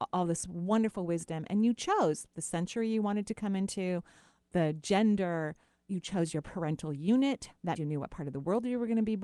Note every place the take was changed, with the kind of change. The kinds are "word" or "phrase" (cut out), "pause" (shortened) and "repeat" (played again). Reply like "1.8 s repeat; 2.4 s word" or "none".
7.8 s word